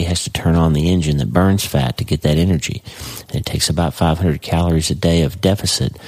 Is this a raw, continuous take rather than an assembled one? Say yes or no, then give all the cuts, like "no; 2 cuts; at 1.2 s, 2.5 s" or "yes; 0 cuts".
yes; 0 cuts